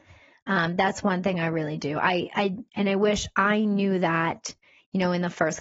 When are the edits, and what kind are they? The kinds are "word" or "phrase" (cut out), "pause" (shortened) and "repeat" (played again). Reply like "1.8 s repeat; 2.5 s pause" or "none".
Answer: none